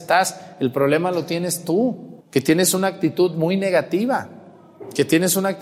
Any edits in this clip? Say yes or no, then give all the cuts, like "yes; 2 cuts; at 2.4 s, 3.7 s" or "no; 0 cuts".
yes; 1 cut; at 2.2 s